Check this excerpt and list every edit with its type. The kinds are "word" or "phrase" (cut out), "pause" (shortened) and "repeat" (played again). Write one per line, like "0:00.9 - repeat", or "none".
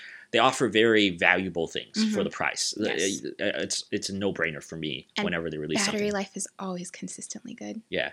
none